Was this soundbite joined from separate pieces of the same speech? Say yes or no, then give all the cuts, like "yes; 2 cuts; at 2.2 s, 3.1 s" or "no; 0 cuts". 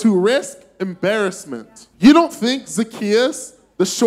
yes; 1 cut; at 1.9 s